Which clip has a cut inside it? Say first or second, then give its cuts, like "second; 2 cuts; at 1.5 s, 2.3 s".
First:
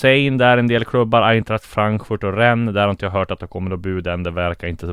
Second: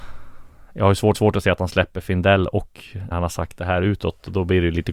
second; 2 cuts; at 1.1 s, 3.1 s